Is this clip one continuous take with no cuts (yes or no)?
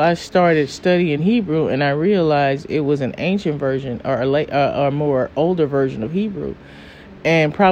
yes